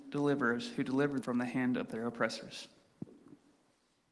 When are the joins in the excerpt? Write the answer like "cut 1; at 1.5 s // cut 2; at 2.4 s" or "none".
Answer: cut 1; at 1.2 s